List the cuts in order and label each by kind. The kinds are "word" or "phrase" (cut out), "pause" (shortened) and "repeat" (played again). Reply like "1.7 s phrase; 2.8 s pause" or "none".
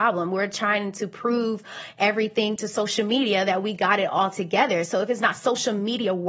none